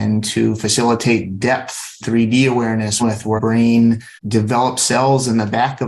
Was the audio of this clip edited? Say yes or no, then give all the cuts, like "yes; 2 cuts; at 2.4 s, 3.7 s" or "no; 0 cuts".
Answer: yes; 4 cuts; at 2.0 s, 3.0 s, 3.4 s, 4.2 s